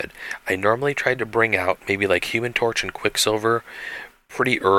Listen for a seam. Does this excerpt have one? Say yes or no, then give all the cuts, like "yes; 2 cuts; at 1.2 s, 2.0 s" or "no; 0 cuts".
no; 0 cuts